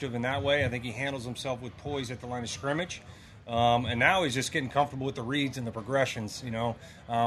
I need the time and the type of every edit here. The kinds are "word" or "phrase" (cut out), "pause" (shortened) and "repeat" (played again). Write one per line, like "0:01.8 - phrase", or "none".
none